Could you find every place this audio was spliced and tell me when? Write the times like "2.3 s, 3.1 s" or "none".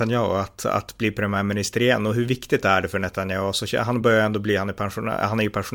none